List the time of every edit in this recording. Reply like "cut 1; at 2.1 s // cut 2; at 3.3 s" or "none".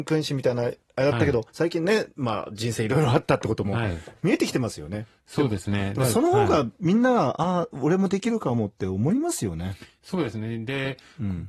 cut 1; at 1.5 s